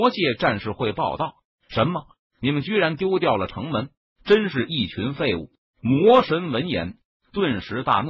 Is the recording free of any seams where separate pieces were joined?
yes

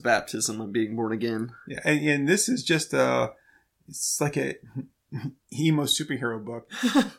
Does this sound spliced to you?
no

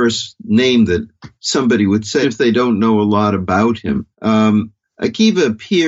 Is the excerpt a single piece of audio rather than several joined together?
no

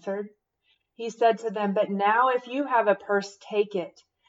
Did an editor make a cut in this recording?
no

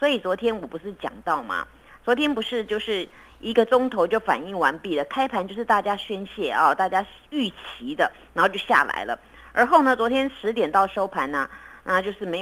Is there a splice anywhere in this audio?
no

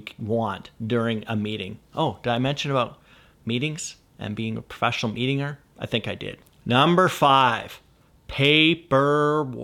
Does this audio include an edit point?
no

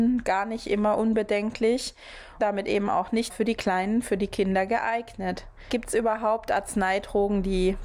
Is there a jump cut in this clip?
yes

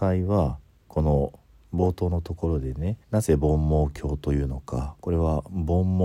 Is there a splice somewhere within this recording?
yes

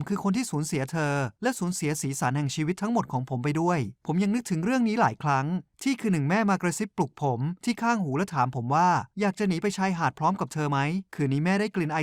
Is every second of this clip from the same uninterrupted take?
no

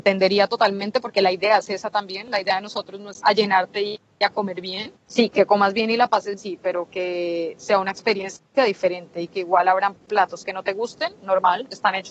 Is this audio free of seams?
no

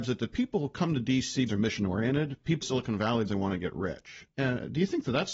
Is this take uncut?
no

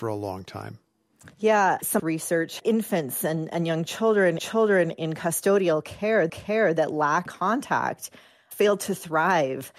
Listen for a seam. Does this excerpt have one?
yes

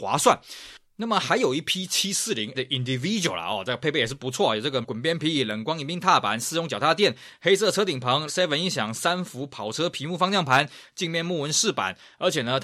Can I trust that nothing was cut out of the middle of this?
no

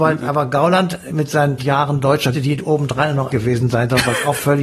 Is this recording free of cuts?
no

